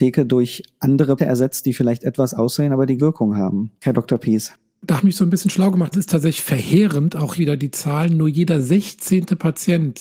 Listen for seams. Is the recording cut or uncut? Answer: cut